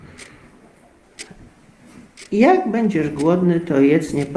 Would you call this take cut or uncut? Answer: uncut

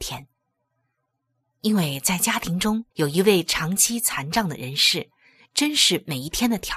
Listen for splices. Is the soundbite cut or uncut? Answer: cut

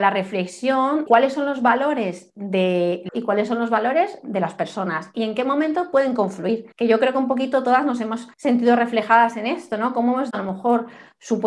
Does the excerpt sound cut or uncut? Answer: cut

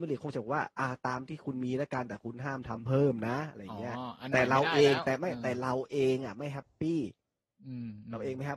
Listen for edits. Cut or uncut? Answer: uncut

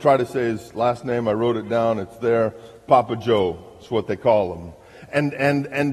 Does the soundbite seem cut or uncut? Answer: uncut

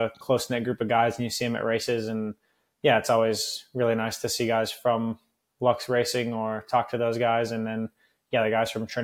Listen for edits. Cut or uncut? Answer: uncut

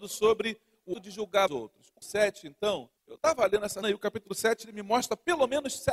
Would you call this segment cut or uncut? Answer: cut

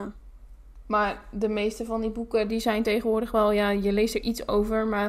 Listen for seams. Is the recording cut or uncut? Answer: uncut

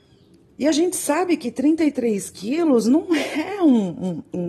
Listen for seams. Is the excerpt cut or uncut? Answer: uncut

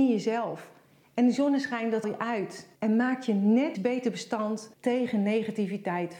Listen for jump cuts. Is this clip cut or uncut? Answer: cut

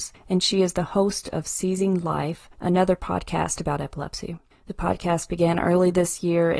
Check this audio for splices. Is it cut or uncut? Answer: uncut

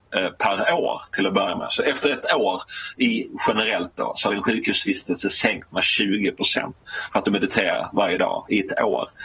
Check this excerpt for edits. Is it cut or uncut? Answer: uncut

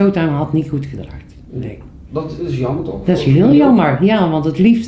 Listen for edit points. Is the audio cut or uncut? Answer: uncut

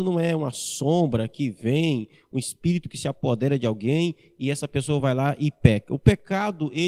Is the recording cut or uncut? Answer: uncut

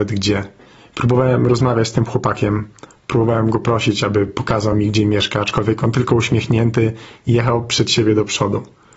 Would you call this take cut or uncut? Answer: uncut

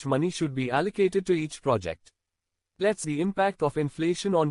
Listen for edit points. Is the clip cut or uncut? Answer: cut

